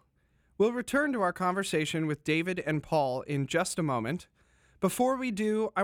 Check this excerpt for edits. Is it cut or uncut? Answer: uncut